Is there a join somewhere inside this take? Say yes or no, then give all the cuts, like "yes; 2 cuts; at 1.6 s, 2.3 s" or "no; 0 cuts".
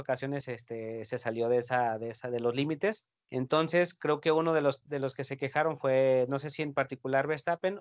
yes; 1 cut; at 3.1 s